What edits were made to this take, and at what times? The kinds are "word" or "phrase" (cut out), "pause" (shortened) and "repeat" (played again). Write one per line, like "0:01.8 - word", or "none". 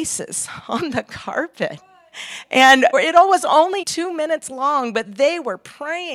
0:02.9 - word
0:03.8 - word